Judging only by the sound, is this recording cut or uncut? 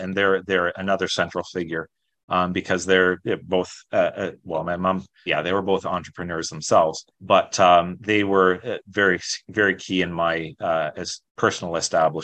cut